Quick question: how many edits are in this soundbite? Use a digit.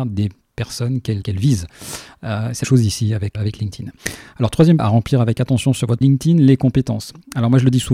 5